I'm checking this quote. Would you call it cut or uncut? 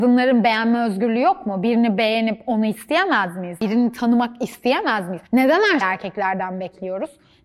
cut